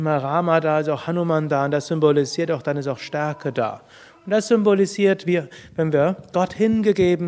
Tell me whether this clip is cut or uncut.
uncut